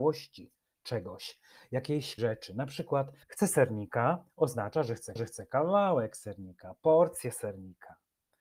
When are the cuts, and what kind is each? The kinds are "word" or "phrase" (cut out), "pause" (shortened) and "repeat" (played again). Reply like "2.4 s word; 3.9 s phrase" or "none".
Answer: 2.2 s word; 3.2 s pause; 5.2 s repeat